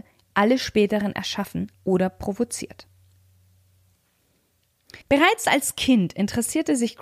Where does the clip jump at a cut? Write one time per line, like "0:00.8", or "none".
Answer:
0:01.7
0:05.0